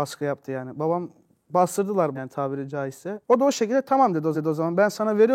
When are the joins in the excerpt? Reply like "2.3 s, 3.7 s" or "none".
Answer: 2.1 s, 4.3 s